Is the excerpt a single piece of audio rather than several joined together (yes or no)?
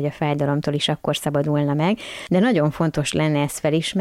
yes